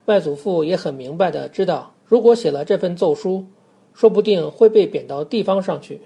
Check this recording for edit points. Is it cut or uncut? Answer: cut